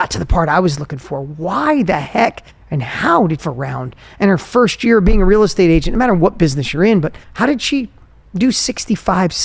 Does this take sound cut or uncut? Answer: cut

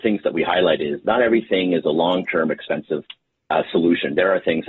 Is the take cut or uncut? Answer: uncut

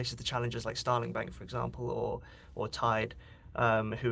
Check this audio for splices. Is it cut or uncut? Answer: uncut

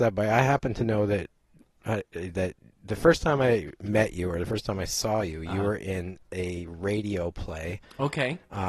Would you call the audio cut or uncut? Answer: uncut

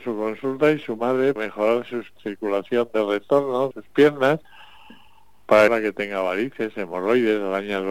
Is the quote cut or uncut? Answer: cut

